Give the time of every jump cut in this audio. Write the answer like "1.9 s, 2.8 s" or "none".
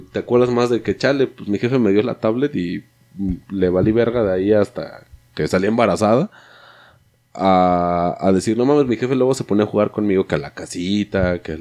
none